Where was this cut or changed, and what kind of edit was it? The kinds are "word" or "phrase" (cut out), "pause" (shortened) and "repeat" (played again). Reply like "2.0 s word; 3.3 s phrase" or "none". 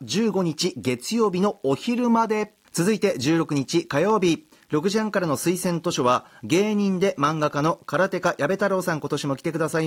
2.6 s pause